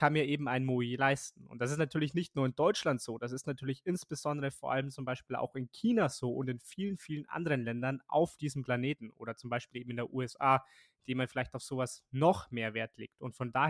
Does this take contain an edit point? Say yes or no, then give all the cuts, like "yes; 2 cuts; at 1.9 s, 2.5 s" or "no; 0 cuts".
no; 0 cuts